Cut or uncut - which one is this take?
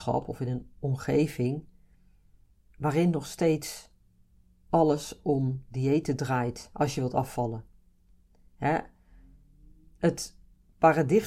uncut